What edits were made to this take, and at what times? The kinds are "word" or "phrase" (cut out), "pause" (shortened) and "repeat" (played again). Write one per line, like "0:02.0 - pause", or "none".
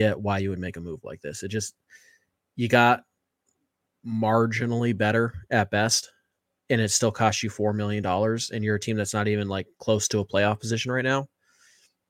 none